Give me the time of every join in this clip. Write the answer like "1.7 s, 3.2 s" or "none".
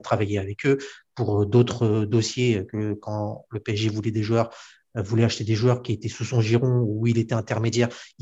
none